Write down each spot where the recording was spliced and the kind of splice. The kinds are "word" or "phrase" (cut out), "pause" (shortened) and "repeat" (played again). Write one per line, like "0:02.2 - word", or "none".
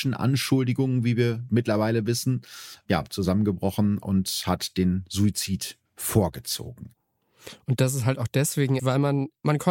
0:05.9 - pause
0:08.8 - word